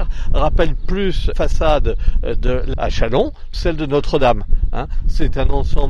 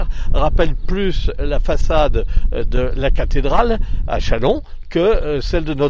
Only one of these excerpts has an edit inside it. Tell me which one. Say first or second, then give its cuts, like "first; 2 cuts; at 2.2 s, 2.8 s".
first; 3 cuts; at 1.3 s, 2.7 s, 3.5 s